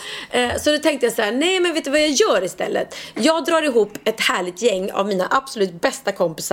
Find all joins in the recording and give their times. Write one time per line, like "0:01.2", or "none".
none